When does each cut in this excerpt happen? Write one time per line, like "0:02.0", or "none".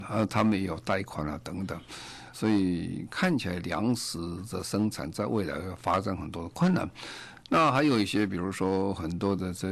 0:02.3